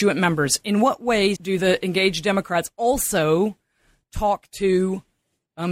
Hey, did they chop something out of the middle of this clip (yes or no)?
yes